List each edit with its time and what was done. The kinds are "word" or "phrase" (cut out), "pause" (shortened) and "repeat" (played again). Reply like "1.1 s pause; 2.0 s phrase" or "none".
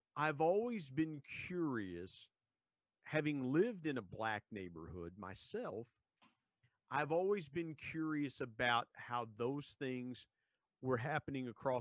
none